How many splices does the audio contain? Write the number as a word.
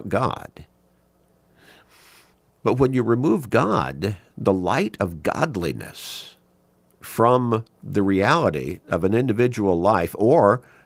zero